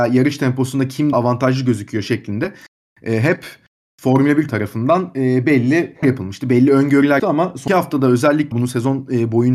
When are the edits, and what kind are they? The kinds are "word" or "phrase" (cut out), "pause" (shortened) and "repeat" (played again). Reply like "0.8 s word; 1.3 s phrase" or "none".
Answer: 1.1 s word; 4.5 s word; 6.0 s word; 7.2 s word; 7.7 s word; 8.5 s word